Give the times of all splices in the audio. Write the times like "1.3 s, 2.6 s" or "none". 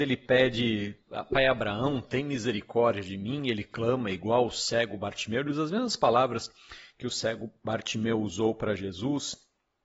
none